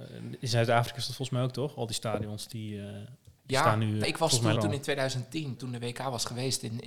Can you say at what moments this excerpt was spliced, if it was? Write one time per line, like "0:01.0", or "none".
0:03.4
0:04.0
0:04.6
0:05.6